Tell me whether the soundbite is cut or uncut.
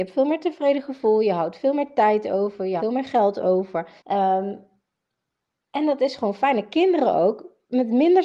cut